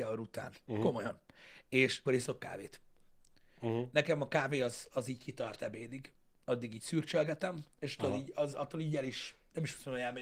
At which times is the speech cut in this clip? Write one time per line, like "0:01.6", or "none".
0:02.1
0:04.9